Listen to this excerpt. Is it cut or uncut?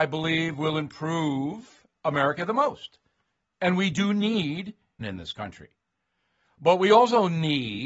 cut